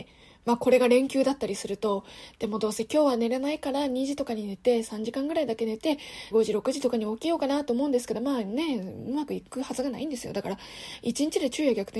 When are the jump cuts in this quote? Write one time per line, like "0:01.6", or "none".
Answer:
0:06.3